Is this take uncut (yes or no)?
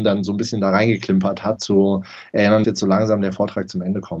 no